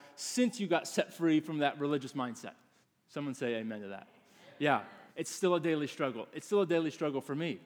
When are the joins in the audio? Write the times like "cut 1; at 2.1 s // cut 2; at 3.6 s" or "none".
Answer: cut 1; at 2.8 s // cut 2; at 5.1 s